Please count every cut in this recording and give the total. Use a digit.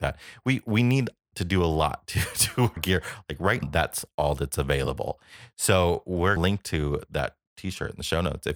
3